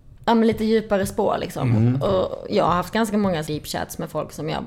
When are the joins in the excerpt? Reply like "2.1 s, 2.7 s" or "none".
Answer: 3.5 s